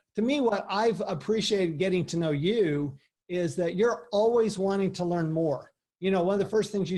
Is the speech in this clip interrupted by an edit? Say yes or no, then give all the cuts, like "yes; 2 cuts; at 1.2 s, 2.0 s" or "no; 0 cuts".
no; 0 cuts